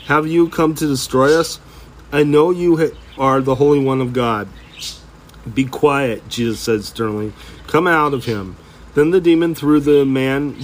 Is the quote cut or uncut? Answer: cut